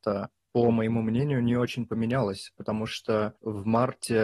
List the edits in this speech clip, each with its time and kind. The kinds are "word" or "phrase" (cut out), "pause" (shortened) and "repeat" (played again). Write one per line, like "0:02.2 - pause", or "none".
none

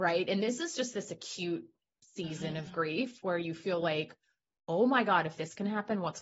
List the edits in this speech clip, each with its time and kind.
none

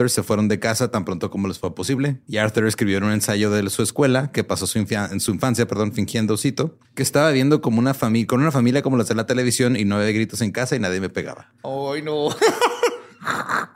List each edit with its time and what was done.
0:02.2 - pause
0:06.8 - pause

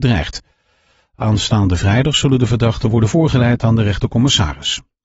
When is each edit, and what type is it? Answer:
none

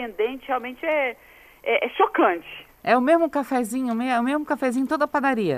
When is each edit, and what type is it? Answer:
none

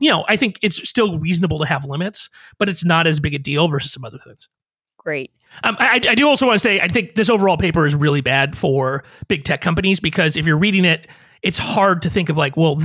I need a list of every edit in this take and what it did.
none

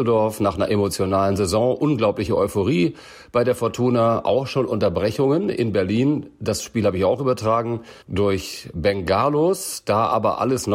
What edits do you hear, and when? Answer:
0:08.0 - pause

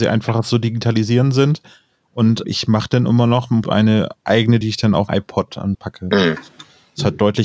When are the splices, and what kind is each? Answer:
0:02.4 - word
0:03.6 - word
0:04.6 - word
0:05.1 - word
0:05.7 - phrase

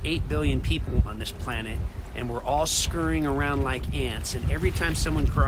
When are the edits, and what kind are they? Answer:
none

